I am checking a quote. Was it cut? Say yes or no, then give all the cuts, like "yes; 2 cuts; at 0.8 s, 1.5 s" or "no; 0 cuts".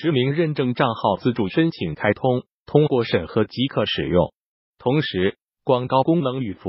no; 0 cuts